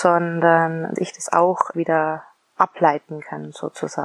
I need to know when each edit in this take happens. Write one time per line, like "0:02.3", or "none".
0:01.0
0:01.7

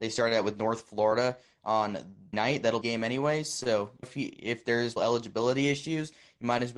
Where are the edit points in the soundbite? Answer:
0:02.3
0:02.8
0:04.0
0:05.0

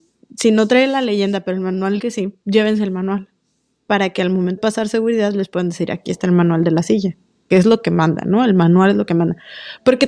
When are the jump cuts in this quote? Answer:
0:02.0
0:02.4
0:04.6
0:07.5

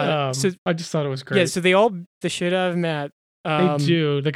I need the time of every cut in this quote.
0:02.2

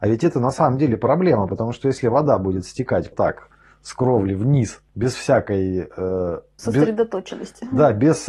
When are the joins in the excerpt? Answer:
0:03.1
0:04.9
0:06.6

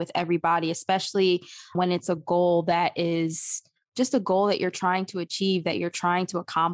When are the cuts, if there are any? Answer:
none

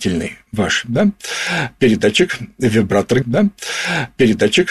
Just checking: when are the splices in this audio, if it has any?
0:03.2

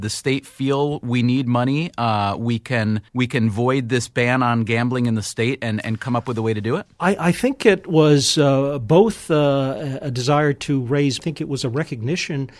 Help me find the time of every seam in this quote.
0:03.1
0:11.2

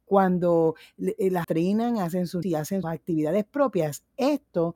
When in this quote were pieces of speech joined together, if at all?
0:01.4
0:02.4
0:02.8

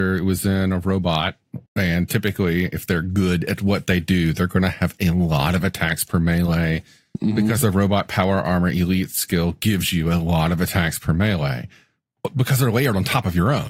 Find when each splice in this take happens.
0:01.7

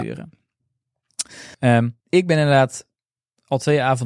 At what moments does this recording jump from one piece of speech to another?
0:01.5
0:02.0

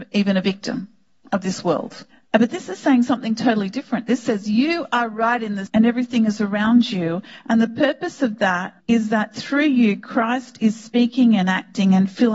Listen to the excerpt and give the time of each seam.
0:05.7
0:08.8

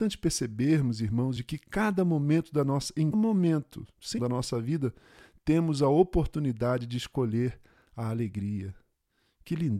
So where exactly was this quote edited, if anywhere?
0:01.4
0:03.1
0:04.2

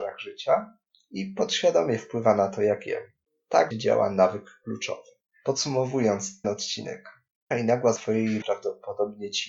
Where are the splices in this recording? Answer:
0:03.7
0:06.4
0:07.5
0:08.0
0:08.4

